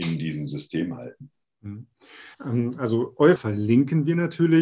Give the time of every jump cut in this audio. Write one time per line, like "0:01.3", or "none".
0:02.3
0:03.4